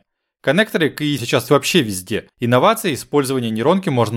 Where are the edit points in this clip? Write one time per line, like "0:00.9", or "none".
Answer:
0:01.2
0:01.5
0:02.3